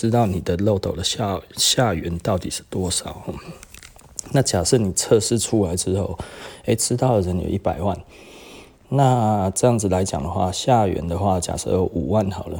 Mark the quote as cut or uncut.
uncut